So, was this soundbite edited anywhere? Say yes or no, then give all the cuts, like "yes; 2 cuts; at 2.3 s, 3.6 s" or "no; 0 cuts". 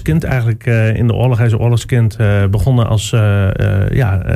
no; 0 cuts